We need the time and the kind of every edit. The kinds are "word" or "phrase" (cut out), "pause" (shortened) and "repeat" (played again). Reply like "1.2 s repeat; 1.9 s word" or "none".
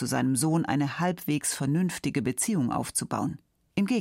none